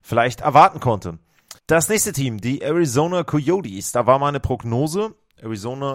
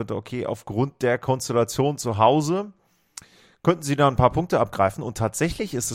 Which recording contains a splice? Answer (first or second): first